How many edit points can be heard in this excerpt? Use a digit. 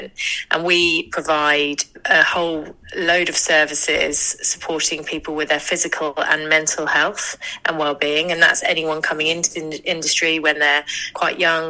1